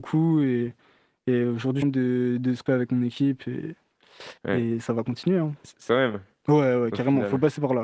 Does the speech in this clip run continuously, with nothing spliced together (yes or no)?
no